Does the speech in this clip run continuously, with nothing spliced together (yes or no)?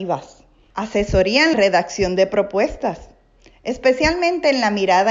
no